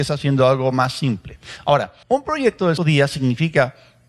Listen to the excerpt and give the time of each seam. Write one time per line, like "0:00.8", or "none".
0:02.0
0:02.8